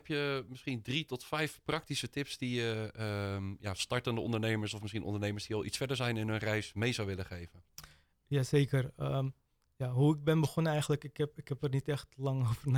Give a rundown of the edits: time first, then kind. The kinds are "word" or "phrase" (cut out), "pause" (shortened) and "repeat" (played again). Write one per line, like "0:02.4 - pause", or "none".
none